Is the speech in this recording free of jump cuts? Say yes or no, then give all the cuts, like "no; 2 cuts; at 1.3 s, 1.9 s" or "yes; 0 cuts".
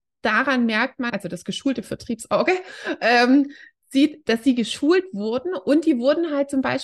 no; 1 cut; at 1.1 s